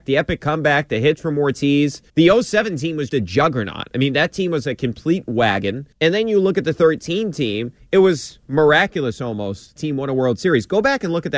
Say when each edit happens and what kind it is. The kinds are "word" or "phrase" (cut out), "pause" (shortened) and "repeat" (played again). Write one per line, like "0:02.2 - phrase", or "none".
0:02.1 - pause
0:03.1 - word
0:05.9 - pause
0:09.8 - phrase